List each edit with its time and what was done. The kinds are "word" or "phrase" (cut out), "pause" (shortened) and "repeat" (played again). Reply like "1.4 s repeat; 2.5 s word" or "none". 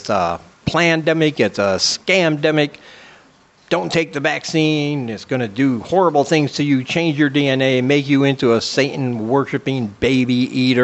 none